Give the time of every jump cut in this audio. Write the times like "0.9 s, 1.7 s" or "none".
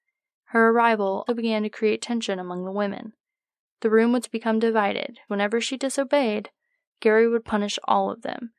1.3 s, 4.2 s, 5.3 s